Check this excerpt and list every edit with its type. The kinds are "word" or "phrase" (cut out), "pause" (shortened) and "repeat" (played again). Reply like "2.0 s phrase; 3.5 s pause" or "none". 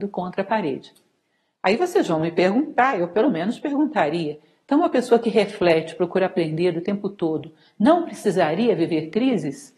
none